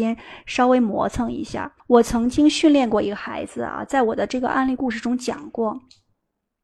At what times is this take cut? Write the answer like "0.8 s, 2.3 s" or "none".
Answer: 1.8 s